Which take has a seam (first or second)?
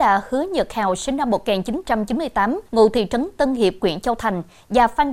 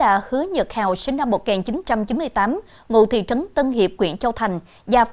first